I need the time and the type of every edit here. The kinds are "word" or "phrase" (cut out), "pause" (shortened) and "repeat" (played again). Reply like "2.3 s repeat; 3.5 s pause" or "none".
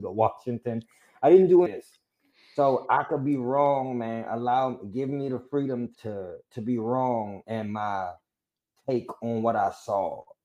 1.7 s word; 5.9 s word; 7.4 s word